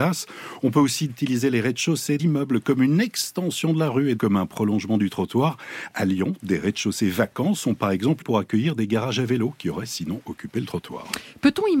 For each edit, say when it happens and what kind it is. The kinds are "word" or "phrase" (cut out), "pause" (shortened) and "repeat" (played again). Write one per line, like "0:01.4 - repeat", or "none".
0:01.1 - word
0:02.2 - word
0:04.2 - word
0:08.2 - word